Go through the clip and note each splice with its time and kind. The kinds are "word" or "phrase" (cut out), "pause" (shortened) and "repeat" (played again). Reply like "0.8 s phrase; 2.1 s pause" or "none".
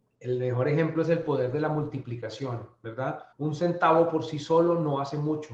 3.3 s pause